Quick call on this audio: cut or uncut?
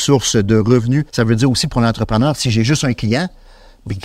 cut